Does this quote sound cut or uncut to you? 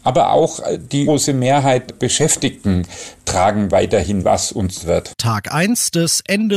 cut